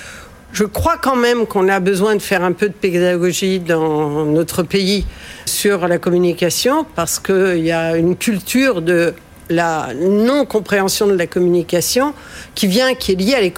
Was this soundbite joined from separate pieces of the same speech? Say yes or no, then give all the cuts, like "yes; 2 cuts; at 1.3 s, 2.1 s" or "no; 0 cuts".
yes; 1 cut; at 5.5 s